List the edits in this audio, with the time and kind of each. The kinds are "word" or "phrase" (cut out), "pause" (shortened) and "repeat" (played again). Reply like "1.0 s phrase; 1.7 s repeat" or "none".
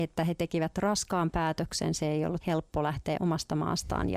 2.4 s word; 3.2 s word

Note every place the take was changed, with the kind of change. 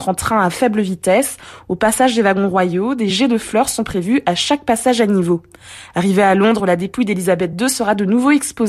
none

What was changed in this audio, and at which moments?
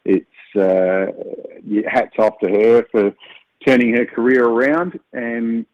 none

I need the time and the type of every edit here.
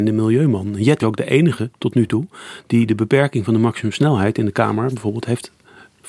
1.0 s word

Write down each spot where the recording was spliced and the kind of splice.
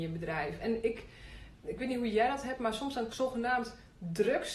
1.6 s word; 3.1 s phrase

